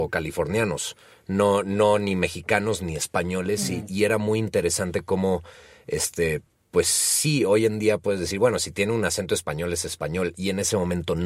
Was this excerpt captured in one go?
yes; 0 cuts

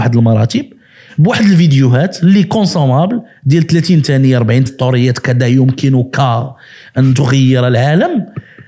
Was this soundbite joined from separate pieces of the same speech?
yes; 1 cut; at 4.7 s

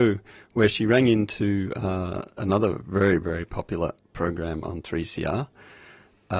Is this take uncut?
no; 1 cut; at 2.3 s

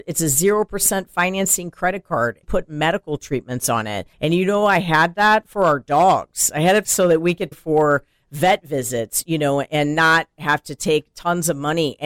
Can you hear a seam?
yes; 4 cuts; at 2.4 s, 4.1 s, 6.8 s, 7.5 s

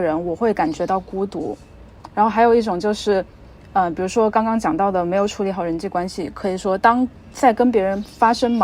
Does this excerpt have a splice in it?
no; 0 cuts

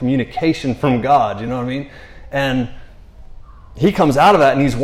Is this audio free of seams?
yes; 0 cuts

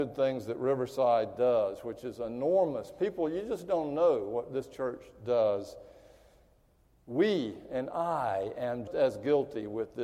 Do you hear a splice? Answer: yes; 1 cut; at 8.9 s

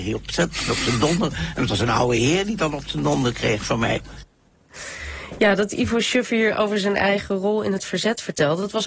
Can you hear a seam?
no; 0 cuts

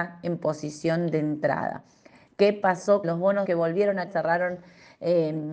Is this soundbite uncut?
no; 3 cuts; at 3.0 s, 3.4 s, 4.1 s

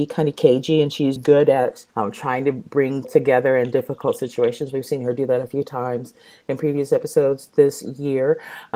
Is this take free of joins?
no; 3 cuts; at 1.2 s, 1.9 s, 3.0 s

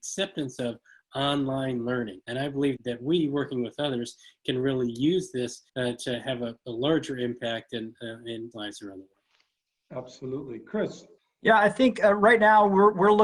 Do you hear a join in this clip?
yes; 5 cuts; at 2.2 s, 2.8 s, 5.7 s, 8.5 s, 11.2 s

